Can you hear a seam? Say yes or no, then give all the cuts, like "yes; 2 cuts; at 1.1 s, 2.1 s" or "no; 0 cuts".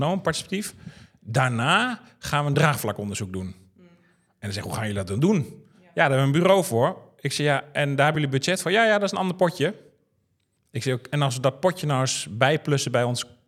no; 0 cuts